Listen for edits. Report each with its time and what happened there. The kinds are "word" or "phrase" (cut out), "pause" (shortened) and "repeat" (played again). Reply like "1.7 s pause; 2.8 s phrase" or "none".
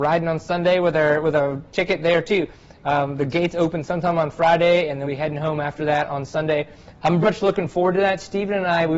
5.0 s word; 7.2 s word